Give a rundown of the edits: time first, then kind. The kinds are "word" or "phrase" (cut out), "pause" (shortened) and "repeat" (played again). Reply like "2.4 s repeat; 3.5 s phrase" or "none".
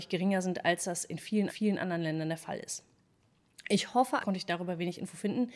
1.5 s repeat; 4.2 s phrase